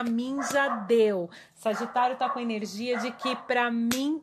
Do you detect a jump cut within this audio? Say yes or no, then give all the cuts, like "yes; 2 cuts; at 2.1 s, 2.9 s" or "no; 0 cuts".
no; 0 cuts